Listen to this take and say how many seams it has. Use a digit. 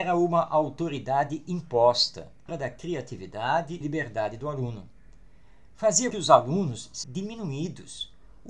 4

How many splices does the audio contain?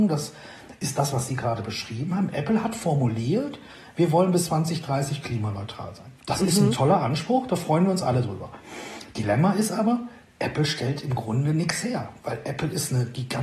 0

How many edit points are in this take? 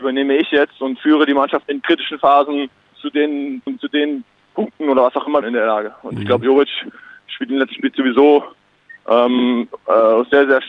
4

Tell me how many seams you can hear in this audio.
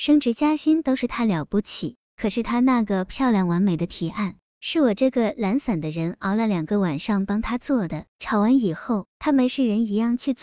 2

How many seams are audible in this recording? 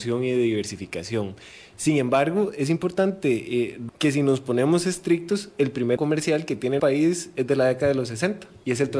3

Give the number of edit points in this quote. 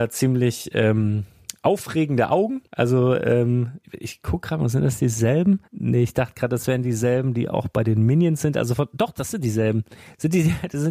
3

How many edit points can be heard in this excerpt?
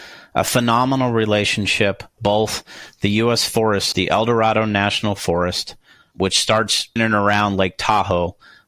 4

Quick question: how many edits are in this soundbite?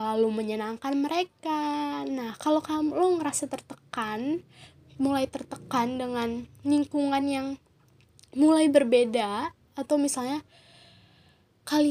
0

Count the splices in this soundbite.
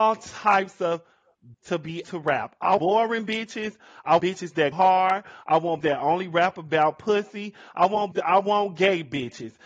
7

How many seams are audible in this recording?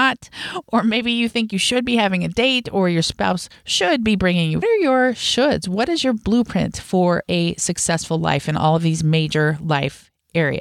1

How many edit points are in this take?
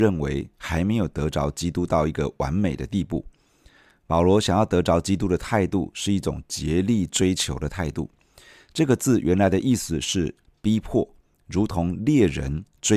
0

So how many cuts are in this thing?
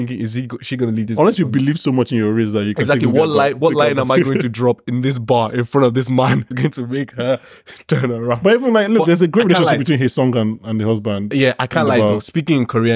1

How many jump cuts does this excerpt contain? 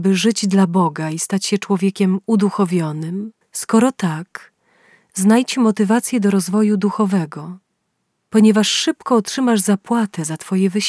1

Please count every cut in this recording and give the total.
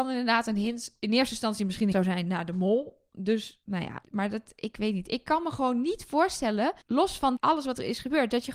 5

